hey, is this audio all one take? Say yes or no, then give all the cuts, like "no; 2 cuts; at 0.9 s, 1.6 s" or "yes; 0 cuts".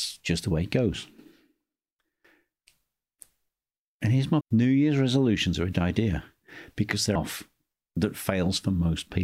no; 3 cuts; at 4.4 s, 5.7 s, 7.2 s